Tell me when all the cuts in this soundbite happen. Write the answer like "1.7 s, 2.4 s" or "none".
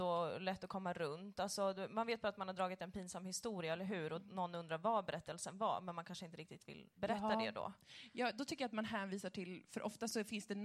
7.0 s